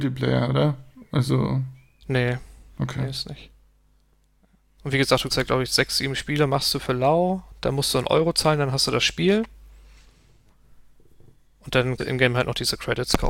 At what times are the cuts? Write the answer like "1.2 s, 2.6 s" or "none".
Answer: 5.3 s, 12.0 s